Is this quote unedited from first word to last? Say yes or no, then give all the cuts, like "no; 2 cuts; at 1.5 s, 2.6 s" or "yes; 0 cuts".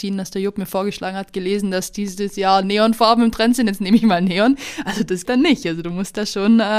no; 1 cut; at 5.3 s